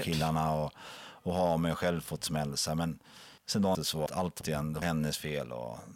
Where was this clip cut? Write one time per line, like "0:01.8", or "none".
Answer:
0:03.4
0:03.7
0:04.1
0:04.4
0:04.8